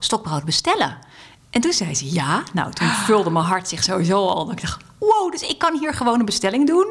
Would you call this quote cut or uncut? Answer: uncut